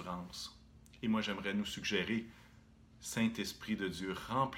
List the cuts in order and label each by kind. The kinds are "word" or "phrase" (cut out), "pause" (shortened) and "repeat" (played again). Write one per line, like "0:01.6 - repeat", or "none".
none